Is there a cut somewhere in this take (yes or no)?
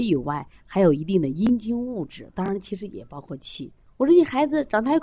yes